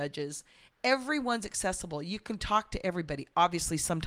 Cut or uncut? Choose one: uncut